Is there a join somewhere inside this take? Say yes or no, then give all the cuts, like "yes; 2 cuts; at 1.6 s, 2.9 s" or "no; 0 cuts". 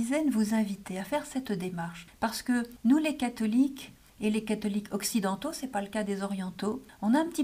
no; 0 cuts